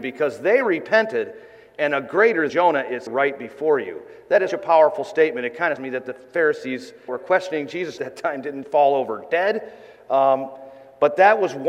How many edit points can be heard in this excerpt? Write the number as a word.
seven